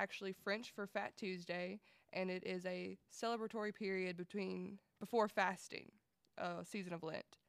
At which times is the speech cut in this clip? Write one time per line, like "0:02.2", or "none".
none